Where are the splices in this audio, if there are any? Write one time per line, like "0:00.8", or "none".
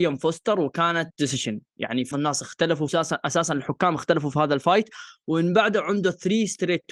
0:01.1
0:02.1
0:02.9